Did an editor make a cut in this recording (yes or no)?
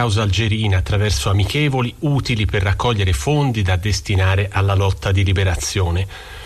no